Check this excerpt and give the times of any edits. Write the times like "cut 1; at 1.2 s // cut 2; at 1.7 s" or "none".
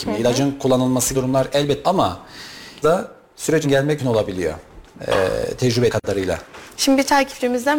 cut 1; at 1.1 s // cut 2; at 1.8 s // cut 3; at 2.8 s // cut 4; at 3.6 s // cut 5; at 4.0 s // cut 6; at 5.9 s